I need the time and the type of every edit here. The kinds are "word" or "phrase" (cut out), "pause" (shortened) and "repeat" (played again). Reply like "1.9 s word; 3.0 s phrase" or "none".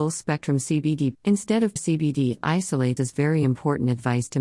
1.1 s word; 1.8 s word; 3.0 s word